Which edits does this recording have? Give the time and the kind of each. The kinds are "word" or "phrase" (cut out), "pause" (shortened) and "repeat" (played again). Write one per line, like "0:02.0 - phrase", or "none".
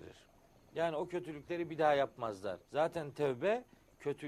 0:02.6 - pause